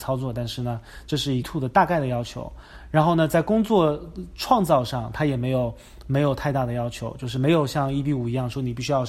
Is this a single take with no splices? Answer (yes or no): no